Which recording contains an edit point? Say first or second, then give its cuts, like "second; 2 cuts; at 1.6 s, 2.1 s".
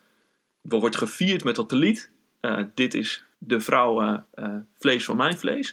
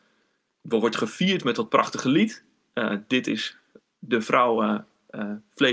first; 3 cuts; at 1.7 s, 3.3 s, 4.3 s